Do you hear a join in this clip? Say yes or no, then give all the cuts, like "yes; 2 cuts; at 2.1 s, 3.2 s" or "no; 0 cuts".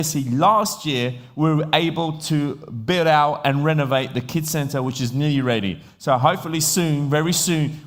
no; 0 cuts